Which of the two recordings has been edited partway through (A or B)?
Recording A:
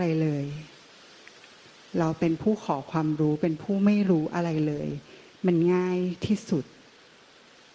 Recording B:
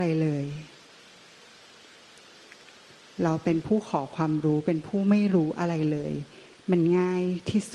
A